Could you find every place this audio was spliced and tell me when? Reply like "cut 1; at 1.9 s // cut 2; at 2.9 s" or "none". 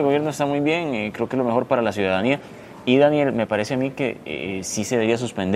none